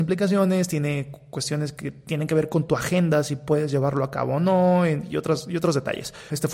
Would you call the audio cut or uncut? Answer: uncut